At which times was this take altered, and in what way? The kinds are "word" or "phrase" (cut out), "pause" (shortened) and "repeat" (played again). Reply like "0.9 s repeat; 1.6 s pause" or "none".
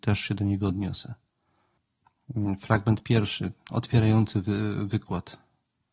3.6 s pause